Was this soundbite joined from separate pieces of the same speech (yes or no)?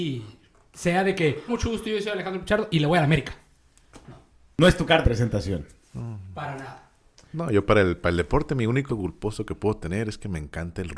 yes